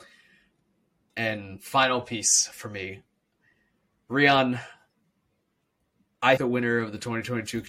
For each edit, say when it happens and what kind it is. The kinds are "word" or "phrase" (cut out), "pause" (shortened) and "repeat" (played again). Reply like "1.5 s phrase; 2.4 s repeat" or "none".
1.1 s word; 6.4 s word